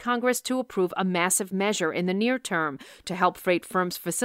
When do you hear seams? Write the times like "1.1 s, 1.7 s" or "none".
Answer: none